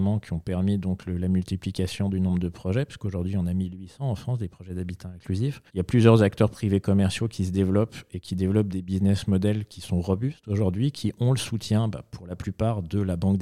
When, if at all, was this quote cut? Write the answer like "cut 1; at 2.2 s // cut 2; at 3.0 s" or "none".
cut 1; at 5.7 s